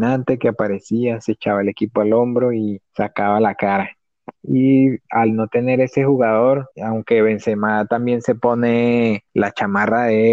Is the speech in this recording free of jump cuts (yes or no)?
no